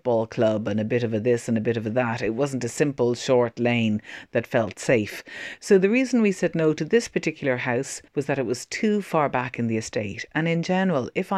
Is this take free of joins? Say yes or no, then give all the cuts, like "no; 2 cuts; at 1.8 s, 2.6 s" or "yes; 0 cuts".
no; 1 cut; at 8.1 s